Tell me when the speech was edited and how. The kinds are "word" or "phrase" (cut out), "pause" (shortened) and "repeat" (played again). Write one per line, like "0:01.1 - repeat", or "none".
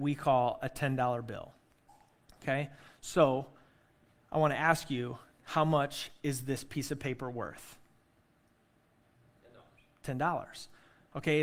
none

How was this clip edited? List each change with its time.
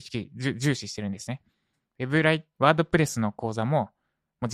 none

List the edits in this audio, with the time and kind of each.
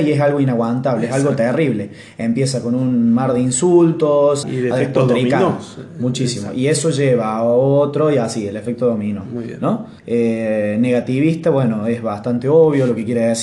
0:04.4 - word
0:10.0 - pause

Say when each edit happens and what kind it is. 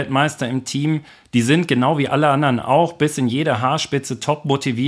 none

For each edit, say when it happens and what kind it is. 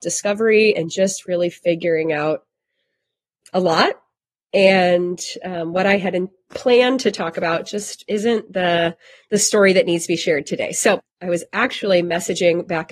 none

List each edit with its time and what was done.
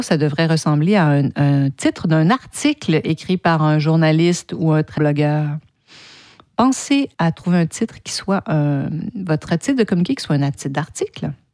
0:05.0 - word
0:07.1 - pause
0:10.5 - word

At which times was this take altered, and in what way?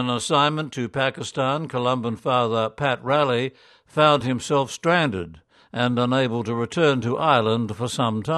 none

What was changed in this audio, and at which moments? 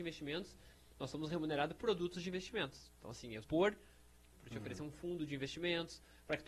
0:01.8 - phrase
0:03.4 - phrase
0:04.3 - phrase

